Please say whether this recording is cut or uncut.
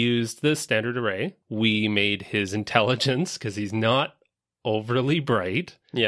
uncut